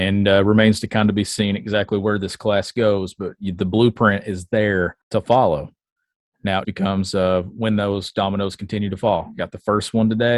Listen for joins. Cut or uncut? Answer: cut